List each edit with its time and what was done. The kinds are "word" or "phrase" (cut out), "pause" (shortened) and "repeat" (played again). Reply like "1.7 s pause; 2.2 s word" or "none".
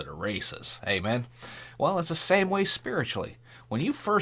none